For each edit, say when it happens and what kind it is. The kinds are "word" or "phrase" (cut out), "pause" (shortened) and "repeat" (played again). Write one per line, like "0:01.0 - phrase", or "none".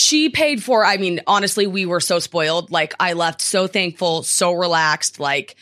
none